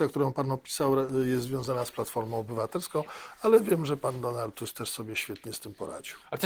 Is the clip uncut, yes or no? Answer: yes